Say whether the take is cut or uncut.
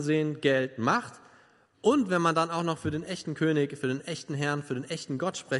uncut